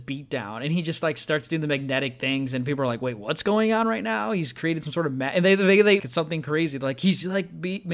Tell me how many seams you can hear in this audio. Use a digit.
1